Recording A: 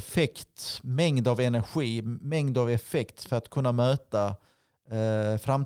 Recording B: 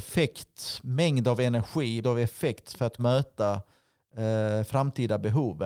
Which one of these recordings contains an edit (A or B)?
B